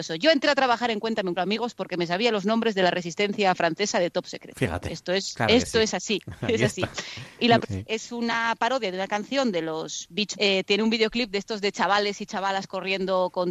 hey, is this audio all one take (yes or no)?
no